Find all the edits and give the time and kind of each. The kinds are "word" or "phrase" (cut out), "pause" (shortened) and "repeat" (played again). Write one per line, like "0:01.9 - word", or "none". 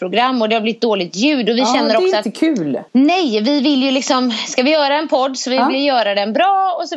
0:02.9 - pause